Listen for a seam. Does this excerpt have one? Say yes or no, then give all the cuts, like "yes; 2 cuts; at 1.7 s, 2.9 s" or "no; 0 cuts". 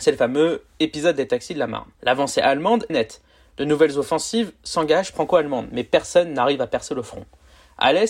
yes; 3 cuts; at 1.9 s, 2.9 s, 5.1 s